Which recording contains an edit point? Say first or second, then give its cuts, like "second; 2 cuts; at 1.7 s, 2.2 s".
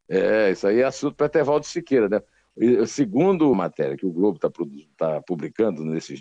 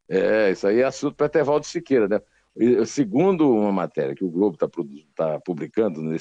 first; 1 cut; at 3.5 s